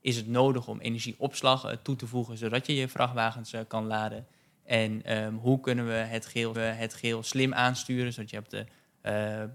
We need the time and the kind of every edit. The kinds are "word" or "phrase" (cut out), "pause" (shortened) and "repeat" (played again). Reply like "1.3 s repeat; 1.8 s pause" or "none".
6.5 s repeat